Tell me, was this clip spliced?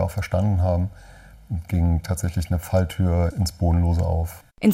yes; 2 cuts; at 1.7 s, 3.3 s

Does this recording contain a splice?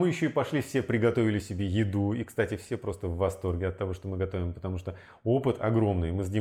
no; 0 cuts

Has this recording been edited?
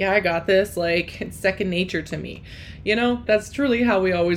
yes; 1 cut; at 3.3 s

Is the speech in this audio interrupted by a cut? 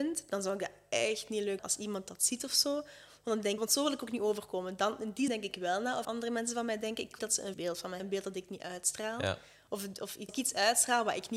yes; 8 cuts; at 1.6 s, 3.6 s, 5.3 s, 6.0 s, 7.2 s, 7.5 s, 8.0 s, 10.3 s

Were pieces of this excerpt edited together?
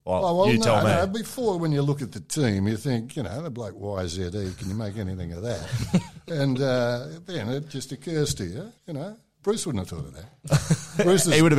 yes; 1 cut; at 8.8 s

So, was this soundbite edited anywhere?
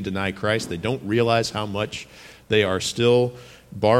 no; 0 cuts

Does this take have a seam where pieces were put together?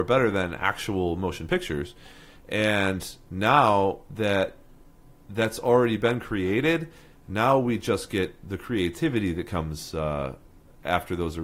no; 0 cuts

